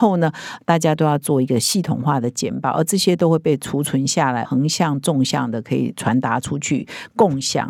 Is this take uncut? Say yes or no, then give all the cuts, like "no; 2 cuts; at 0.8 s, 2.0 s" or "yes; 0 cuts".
no; 1 cut; at 4.4 s